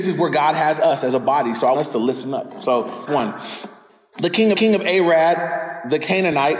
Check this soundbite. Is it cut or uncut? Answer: cut